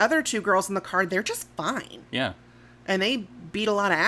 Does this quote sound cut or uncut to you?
cut